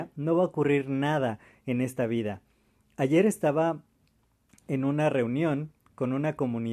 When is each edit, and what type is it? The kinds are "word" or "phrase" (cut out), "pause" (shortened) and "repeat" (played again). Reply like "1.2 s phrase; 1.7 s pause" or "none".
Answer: none